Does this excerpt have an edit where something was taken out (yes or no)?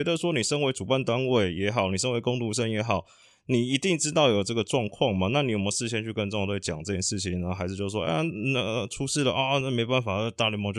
no